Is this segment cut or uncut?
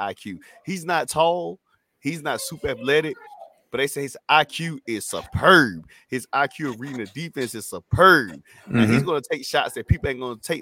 uncut